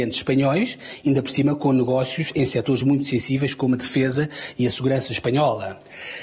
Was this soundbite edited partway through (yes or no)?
no